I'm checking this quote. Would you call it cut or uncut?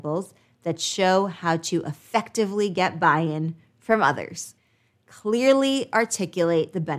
uncut